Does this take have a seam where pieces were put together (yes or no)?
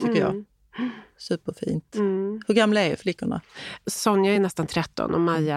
no